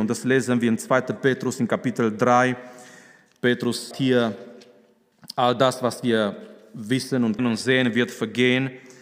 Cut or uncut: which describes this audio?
cut